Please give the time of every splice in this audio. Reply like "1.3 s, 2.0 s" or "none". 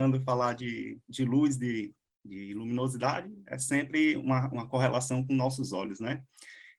none